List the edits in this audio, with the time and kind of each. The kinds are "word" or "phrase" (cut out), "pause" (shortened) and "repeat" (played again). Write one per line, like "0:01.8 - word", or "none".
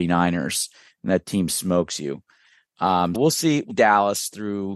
0:03.1 - word
0:03.7 - word